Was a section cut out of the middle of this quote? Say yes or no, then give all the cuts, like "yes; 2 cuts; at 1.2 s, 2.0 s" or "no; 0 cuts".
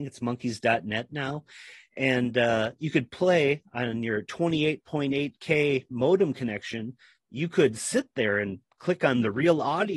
no; 0 cuts